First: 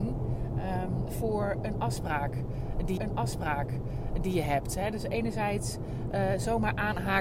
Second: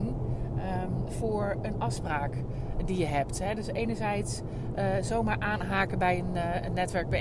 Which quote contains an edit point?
first; 1 cut; at 3.0 s

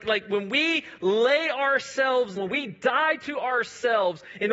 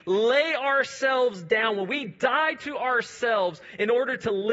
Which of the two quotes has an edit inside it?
first; 1 cut; at 2.4 s

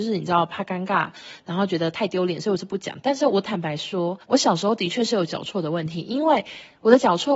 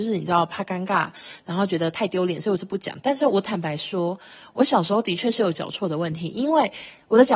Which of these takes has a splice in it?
first; 1 cut; at 4.2 s

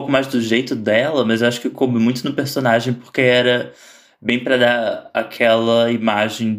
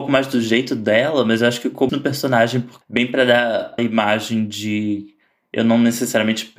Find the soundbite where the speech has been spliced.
second; 3 cuts; at 1.9 s, 2.8 s, 3.8 s

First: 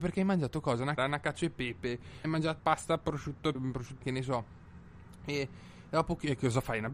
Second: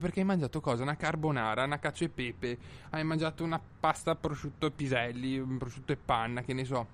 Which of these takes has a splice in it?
first; 5 cuts; at 1.0 s, 2.2 s, 2.6 s, 3.5 s, 4.0 s

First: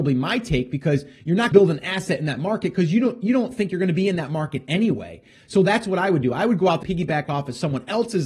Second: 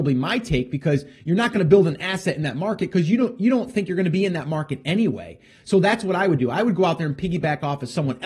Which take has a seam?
first; 2 cuts; at 1.5 s, 6.8 s

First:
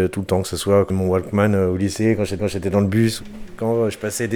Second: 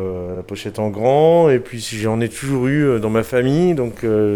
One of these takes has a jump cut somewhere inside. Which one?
first; 2 cuts; at 0.9 s, 2.4 s

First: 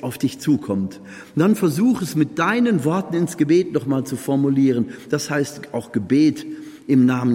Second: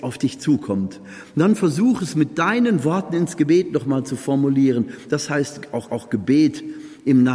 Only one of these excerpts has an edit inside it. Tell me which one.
second; 1 cut; at 5.9 s

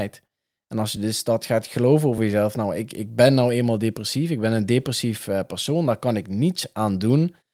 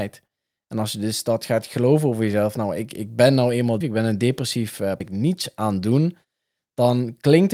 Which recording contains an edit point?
second; 2 cuts; at 3.8 s, 5.0 s

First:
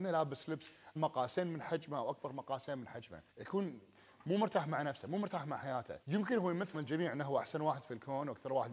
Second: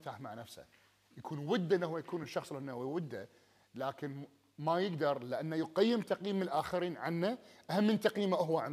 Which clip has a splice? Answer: first; 4 cuts; at 1.0 s, 3.3 s, 6.0 s, 6.7 s

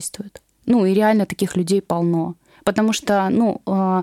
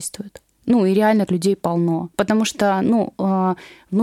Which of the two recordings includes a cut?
second; 2 cuts; at 1.3 s, 2.1 s

